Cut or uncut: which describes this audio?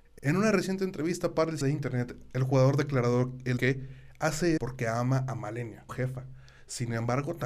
cut